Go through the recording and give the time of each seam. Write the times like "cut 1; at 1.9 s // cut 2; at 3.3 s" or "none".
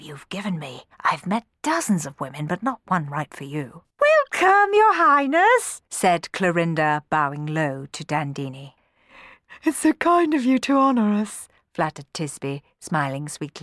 cut 1; at 0.9 s // cut 2; at 3.9 s // cut 3; at 5.9 s